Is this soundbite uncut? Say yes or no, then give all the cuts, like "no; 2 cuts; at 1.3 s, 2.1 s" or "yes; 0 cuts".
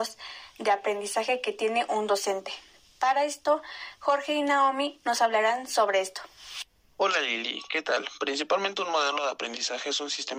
yes; 0 cuts